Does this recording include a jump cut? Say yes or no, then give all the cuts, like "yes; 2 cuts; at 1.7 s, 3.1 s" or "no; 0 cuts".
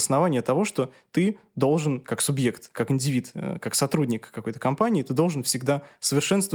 no; 0 cuts